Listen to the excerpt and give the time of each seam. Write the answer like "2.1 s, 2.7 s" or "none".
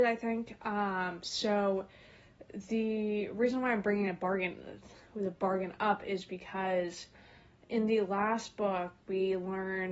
none